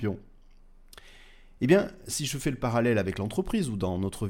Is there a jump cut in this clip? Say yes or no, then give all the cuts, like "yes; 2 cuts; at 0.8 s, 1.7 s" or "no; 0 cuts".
no; 0 cuts